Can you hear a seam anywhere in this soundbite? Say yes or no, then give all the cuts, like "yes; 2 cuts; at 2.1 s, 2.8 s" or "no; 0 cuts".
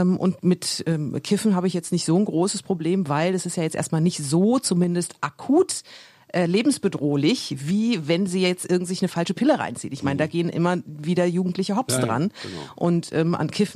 no; 0 cuts